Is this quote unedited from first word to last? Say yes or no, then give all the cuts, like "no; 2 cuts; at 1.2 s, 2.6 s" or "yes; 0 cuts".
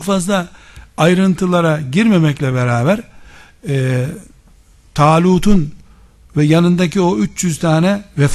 yes; 0 cuts